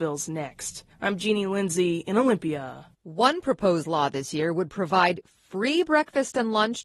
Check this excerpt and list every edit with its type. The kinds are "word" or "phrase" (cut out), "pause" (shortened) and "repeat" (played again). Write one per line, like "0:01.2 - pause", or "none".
0:00.9 - pause
0:02.9 - pause